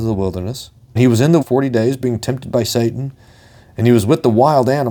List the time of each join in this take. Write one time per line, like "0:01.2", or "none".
0:01.0
0:01.4